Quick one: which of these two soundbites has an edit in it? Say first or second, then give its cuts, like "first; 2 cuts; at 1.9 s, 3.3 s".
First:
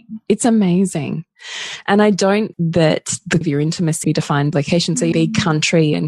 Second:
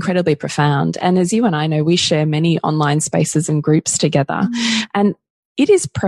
first; 5 cuts; at 2.5 s, 3.4 s, 4.0 s, 4.5 s, 5.1 s